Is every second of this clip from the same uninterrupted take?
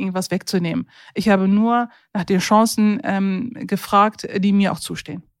yes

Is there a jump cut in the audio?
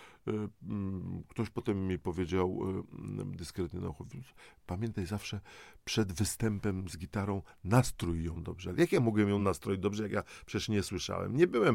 no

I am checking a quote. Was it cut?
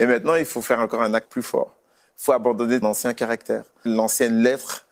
yes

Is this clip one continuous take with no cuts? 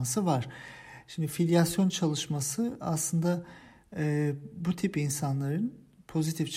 yes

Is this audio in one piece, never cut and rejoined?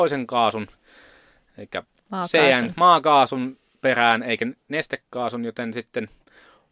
yes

